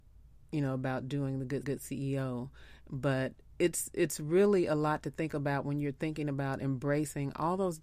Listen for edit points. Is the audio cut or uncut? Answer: cut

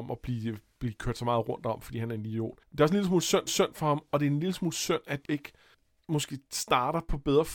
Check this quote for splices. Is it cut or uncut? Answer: cut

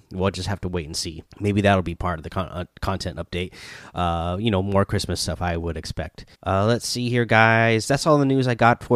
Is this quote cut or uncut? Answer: cut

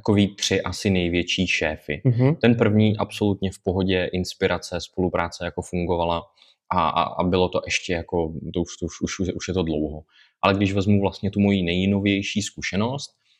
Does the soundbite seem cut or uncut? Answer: uncut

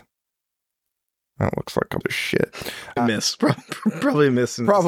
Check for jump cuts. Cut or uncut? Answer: cut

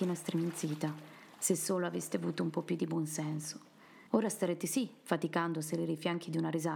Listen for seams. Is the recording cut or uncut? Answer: cut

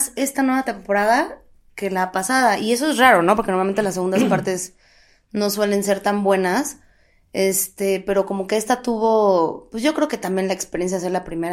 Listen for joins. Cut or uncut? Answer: uncut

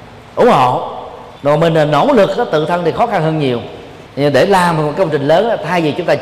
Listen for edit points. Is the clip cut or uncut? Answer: cut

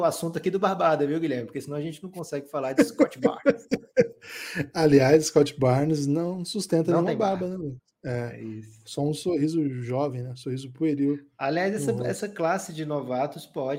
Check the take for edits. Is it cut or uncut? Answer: uncut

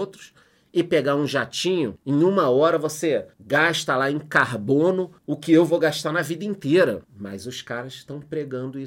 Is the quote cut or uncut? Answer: cut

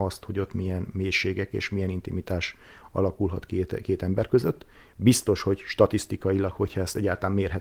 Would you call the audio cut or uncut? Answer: uncut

